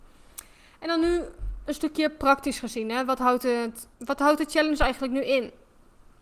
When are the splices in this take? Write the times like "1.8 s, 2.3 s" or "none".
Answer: 3.9 s